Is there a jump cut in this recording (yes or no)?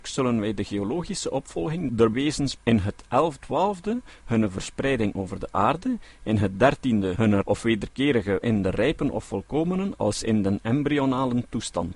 yes